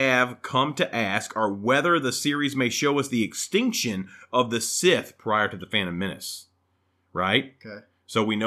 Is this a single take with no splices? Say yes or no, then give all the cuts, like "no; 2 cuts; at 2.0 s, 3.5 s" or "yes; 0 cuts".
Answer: yes; 0 cuts